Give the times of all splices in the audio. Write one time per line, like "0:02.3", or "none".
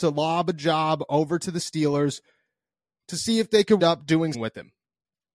0:03.8
0:04.3